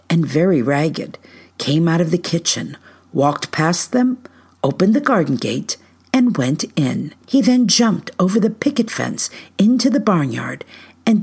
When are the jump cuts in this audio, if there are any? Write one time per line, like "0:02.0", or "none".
0:07.2